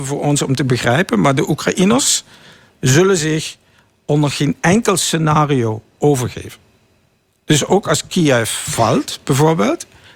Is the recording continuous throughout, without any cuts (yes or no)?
yes